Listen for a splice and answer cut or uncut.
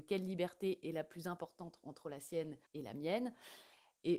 cut